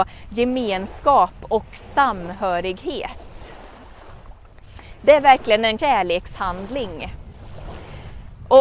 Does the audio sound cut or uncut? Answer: cut